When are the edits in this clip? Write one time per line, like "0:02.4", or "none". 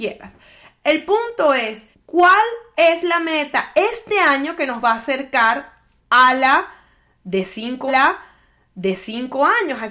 0:01.9
0:07.9